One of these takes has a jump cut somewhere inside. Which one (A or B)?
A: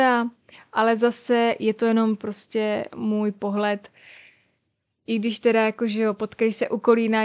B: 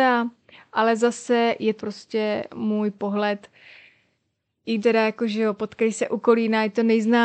B